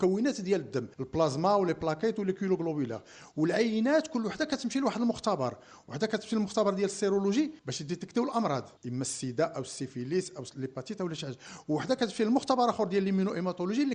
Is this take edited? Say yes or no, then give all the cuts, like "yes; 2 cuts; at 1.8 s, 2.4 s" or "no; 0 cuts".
yes; 3 cuts; at 0.9 s, 7.6 s, 8.8 s